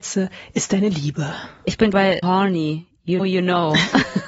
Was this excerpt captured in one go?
no; 3 cuts; at 1.9 s, 2.2 s, 3.2 s

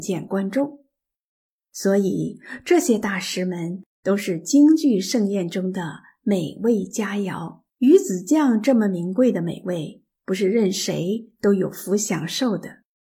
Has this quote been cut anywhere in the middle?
yes; 1 cut; at 7.7 s

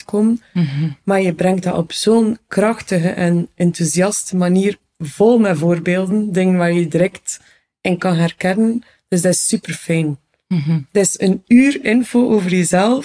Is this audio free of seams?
yes; 0 cuts

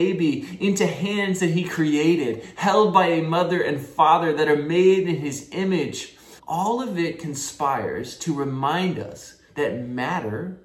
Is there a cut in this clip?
yes; 2 cuts; at 6.4 s, 9.5 s

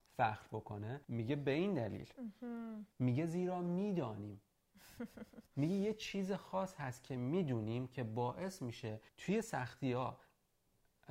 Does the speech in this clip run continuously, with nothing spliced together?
no; 4 cuts; at 1.0 s, 2.9 s, 5.5 s, 9.1 s

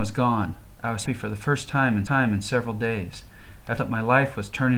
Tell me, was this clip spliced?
yes; 3 cuts; at 1.1 s, 2.1 s, 3.8 s

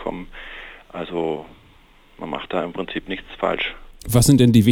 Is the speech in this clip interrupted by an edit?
no; 0 cuts

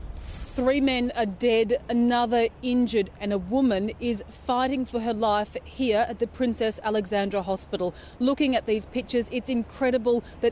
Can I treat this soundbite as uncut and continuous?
yes; 0 cuts

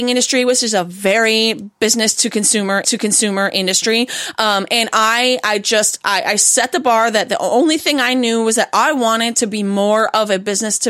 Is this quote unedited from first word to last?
no; 1 cut; at 2.8 s

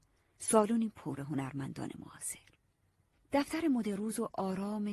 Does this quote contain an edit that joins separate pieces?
yes; 1 cut; at 1.2 s

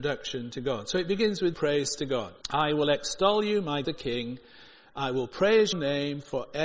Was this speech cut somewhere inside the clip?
yes; 4 cuts; at 1.5 s, 2.4 s, 3.8 s, 5.7 s

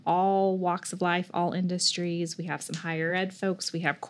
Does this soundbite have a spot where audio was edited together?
no; 0 cuts

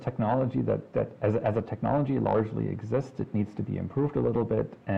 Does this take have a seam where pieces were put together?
no; 0 cuts

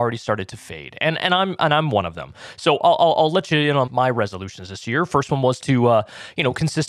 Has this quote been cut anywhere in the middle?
yes; 1 cut; at 3.9 s

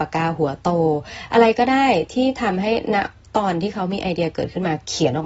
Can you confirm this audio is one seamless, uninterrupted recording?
yes; 0 cuts

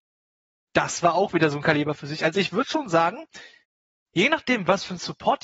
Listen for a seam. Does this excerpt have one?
no; 0 cuts

